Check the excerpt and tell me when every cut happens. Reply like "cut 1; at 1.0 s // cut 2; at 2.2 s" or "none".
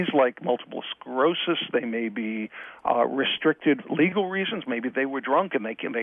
cut 1; at 3.8 s // cut 2; at 4.9 s